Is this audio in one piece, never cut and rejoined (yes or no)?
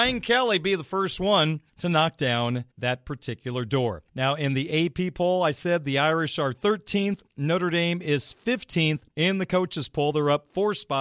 no